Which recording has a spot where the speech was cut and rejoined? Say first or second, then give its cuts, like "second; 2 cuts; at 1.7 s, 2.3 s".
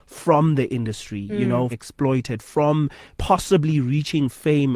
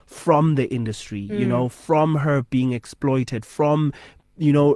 first; 2 cuts; at 1.7 s, 3.1 s